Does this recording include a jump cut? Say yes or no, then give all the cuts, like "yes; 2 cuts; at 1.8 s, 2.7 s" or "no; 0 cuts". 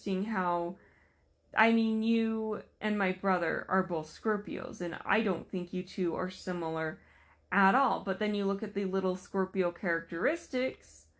no; 0 cuts